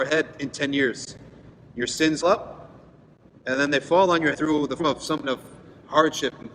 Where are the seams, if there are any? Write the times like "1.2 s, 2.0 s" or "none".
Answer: 2.2 s, 4.3 s, 4.8 s, 5.2 s